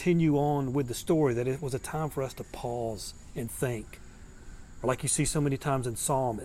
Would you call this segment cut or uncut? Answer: uncut